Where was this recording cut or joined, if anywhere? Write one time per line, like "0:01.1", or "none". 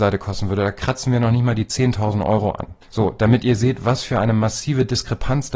0:02.8

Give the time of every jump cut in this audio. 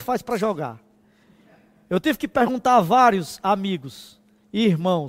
none

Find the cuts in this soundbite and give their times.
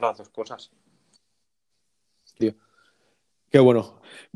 0:02.4

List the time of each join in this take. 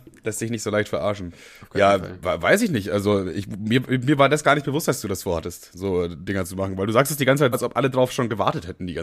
0:07.5

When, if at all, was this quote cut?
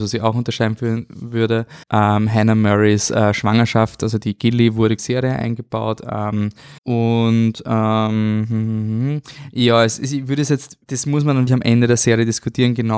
0:01.8
0:05.0
0:06.8
0:10.8
0:11.5

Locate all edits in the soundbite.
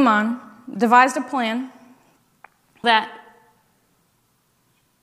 0:02.8

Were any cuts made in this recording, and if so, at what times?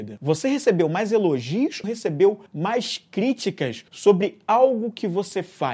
0:01.8
0:02.5
0:03.9

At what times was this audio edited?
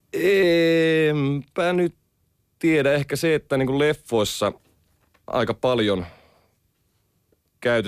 none

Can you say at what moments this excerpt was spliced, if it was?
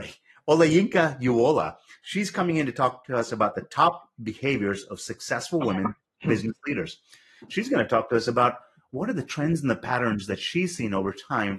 none

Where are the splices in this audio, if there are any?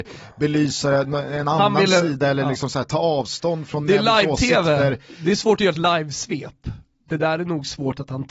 none

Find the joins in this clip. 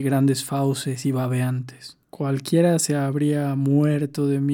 0:02.0

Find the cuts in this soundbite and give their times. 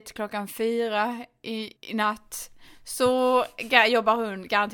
0:01.8

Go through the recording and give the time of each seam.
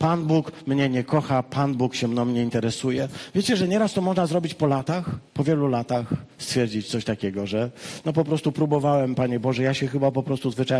0:05.3

